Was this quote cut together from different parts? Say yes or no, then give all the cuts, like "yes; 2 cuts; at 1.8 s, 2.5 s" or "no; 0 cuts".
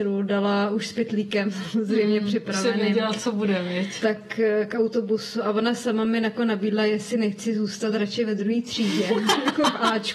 no; 0 cuts